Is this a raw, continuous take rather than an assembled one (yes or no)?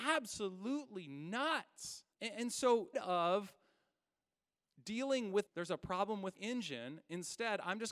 no